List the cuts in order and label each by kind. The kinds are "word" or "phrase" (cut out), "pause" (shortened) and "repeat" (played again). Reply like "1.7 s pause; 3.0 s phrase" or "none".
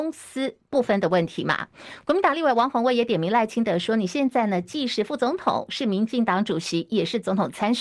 none